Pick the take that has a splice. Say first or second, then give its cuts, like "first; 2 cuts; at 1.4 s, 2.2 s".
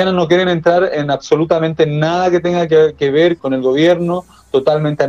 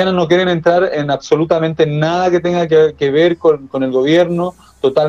first; 1 cut; at 3.4 s